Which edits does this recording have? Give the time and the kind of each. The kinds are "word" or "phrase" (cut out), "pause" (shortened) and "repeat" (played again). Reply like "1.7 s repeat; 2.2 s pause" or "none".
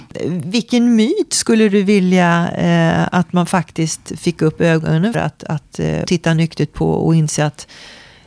5.1 s word; 6.1 s word